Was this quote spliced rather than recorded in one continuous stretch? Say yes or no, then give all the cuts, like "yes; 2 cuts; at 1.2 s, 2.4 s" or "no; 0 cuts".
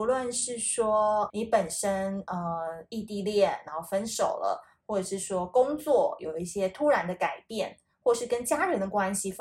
yes; 1 cut; at 1.3 s